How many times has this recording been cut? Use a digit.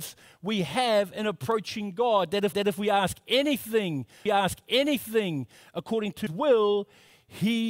3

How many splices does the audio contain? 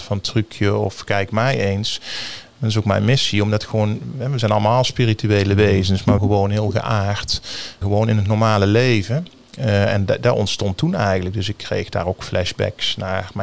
2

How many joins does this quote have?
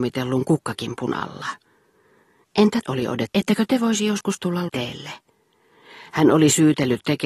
3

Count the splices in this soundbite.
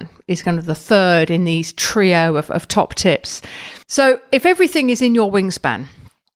1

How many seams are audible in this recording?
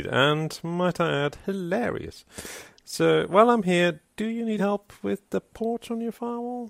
1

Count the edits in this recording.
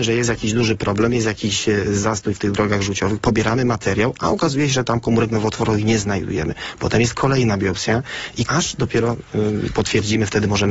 1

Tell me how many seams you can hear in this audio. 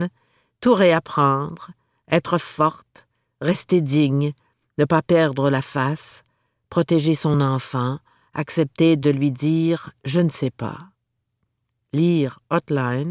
0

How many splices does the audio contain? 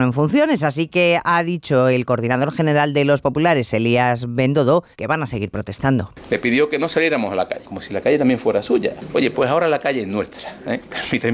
1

